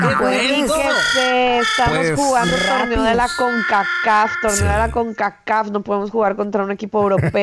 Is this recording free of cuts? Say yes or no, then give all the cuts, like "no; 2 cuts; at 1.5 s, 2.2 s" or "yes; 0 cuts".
yes; 0 cuts